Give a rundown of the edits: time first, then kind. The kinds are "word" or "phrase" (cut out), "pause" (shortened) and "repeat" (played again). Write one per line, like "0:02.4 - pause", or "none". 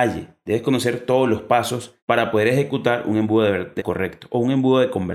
0:02.0 - pause
0:03.8 - word